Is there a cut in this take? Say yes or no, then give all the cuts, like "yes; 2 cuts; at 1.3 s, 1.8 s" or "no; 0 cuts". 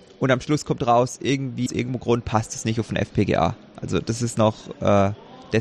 yes; 1 cut; at 1.7 s